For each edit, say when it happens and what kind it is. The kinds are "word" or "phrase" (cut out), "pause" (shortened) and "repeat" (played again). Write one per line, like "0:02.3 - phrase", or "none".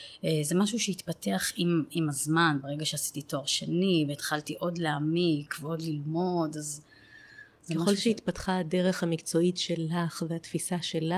none